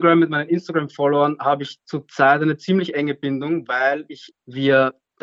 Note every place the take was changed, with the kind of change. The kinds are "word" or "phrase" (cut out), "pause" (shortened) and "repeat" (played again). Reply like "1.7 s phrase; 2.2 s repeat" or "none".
4.3 s word